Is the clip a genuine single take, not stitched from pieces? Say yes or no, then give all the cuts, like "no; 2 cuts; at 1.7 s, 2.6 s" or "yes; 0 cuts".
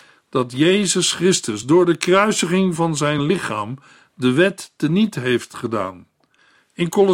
yes; 0 cuts